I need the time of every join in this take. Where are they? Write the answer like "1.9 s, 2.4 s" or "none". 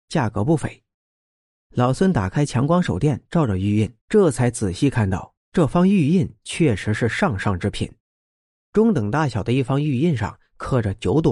4.0 s, 5.4 s

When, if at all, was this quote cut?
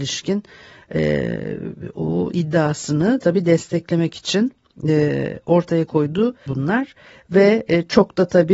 6.5 s

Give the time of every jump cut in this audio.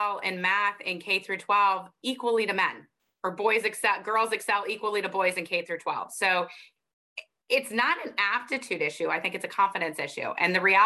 none

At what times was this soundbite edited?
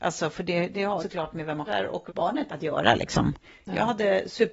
1.0 s, 1.7 s, 2.1 s, 2.5 s

